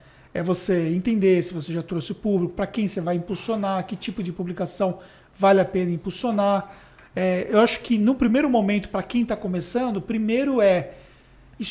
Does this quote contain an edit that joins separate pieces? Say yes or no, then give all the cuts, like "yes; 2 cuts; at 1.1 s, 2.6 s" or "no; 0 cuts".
no; 0 cuts